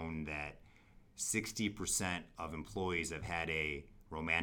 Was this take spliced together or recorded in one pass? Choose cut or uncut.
uncut